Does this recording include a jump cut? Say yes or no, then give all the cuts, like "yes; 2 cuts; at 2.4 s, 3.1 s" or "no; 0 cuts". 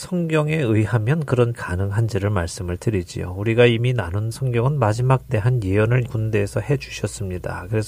yes; 4 cuts; at 1.5 s, 4.3 s, 5.3 s, 6.1 s